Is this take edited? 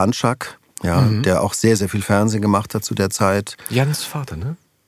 no; 0 cuts

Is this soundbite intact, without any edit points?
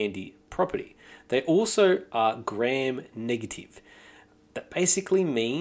yes; 0 cuts

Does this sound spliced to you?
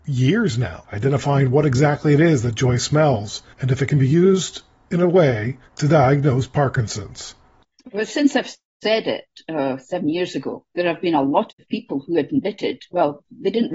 yes; 4 cuts; at 3.5 s, 5.7 s, 10.7 s, 11.5 s

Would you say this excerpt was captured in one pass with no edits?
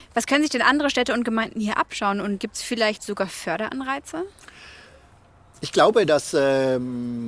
no; 1 cut; at 2.4 s

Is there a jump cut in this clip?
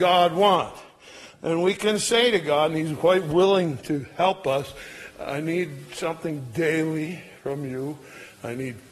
no; 0 cuts

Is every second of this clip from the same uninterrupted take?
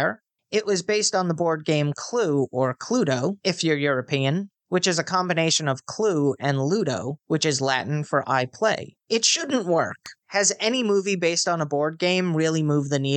no; 1 cut; at 9.0 s

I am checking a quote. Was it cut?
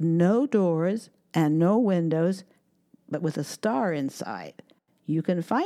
no; 0 cuts

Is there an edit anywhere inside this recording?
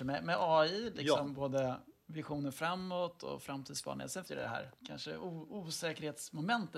yes; 2 cuts; at 4.2 s, 4.8 s

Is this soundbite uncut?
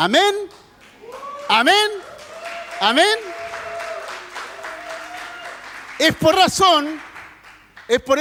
no; 1 cut; at 6.3 s

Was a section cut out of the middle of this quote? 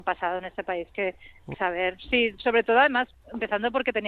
yes; 1 cut; at 1.5 s

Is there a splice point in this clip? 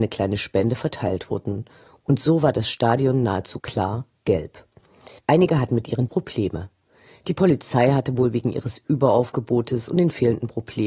yes; 3 cuts; at 3.6 s, 5.2 s, 6.1 s

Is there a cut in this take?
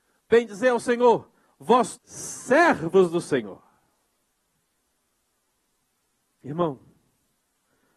yes; 1 cut; at 2.0 s

